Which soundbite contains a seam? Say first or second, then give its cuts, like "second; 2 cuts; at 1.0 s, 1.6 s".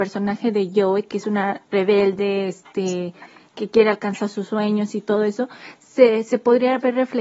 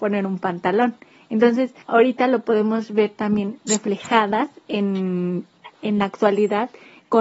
second; 1 cut; at 1.8 s